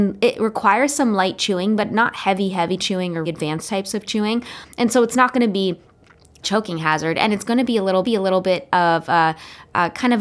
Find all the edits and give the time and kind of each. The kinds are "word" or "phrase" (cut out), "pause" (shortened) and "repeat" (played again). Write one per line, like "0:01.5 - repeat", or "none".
0:03.3 - word
0:06.4 - phrase
0:08.0 - repeat

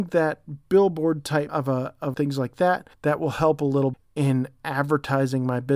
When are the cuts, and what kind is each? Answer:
0:01.5 - word
0:02.1 - phrase
0:02.9 - pause
0:03.9 - word

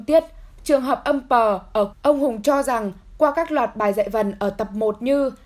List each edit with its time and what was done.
0:01.9 - phrase

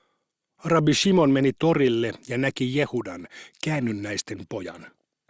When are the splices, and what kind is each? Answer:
none

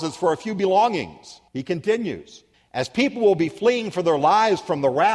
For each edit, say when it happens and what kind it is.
0:01.5 - pause
0:02.5 - pause

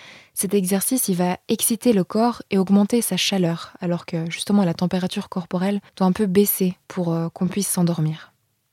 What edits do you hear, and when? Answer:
0:05.9 - pause
0:06.8 - pause

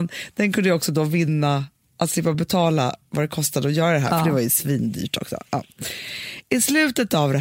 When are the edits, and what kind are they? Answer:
none

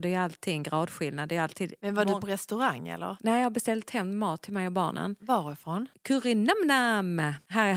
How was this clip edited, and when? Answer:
none

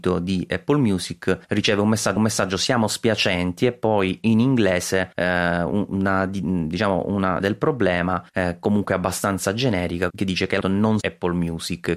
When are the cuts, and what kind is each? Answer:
0:01.4 - pause
0:02.2 - repeat
0:05.1 - pause
0:07.4 - word
0:08.3 - pause
0:10.1 - word
0:10.6 - word
0:11.0 - phrase

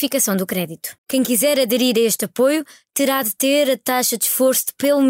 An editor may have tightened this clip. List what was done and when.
0:01.0 - pause

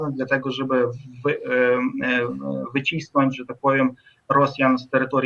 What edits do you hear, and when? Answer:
none

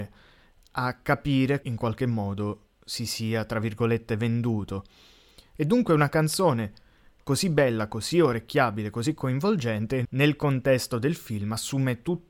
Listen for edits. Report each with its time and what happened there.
0:01.6 - phrase
0:10.0 - word

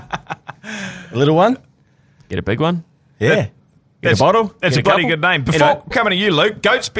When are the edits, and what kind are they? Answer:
0:05.9 - word

